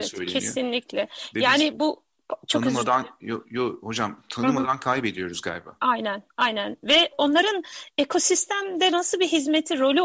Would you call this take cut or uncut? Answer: uncut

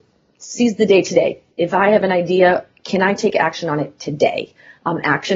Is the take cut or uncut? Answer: cut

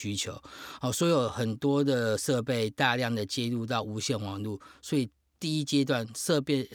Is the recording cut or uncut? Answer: uncut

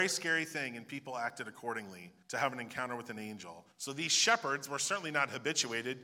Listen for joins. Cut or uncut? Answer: cut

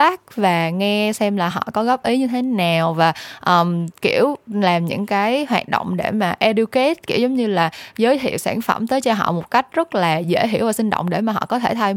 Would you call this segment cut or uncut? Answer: uncut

